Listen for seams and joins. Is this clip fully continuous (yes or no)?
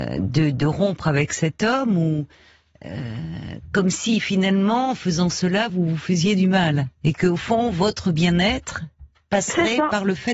yes